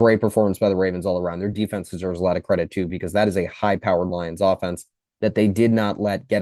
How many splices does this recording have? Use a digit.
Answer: 0